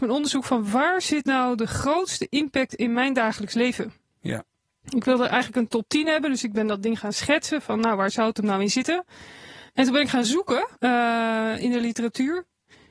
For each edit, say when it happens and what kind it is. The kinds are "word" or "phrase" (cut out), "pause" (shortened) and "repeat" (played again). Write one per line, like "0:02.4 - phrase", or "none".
0:09.7 - pause
0:10.8 - pause

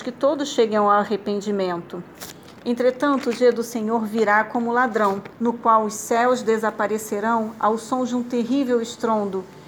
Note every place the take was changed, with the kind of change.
0:05.3 - pause

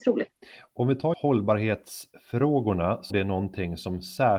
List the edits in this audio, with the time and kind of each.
0:01.1 - word
0:03.1 - word

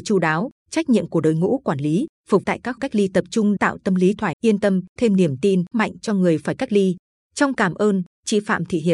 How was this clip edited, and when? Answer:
0:02.4 - word
0:02.8 - word
0:03.6 - word
0:04.3 - word
0:05.0 - word
0:05.7 - word
0:07.5 - word

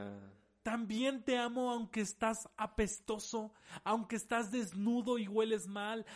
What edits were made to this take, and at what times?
none

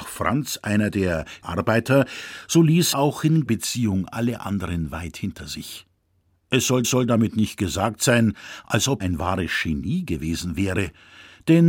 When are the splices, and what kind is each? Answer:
0:01.4 - word
0:02.9 - word
0:03.5 - word
0:06.8 - repeat
0:09.0 - word

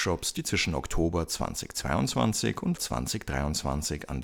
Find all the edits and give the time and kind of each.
0:02.8 - word

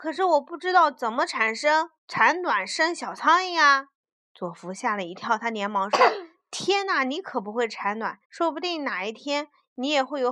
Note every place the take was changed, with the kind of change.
0:02.0 - pause
0:03.9 - pause
0:08.2 - pause

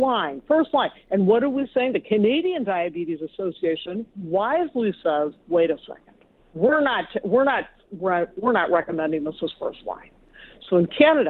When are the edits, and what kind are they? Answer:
0:06.4 - pause

